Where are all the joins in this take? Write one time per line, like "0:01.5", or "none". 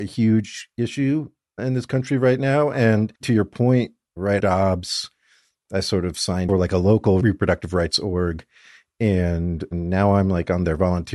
0:03.2
0:04.4
0:06.5